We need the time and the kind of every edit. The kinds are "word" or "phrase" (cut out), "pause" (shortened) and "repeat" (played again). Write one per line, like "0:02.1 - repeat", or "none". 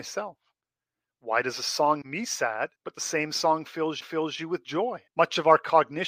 0:02.0 - word
0:02.8 - pause
0:04.0 - repeat
0:05.1 - pause